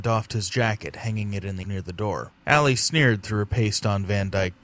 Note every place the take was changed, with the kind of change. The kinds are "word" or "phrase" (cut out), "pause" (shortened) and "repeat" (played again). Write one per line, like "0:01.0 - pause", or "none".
0:01.6 - word
0:02.4 - pause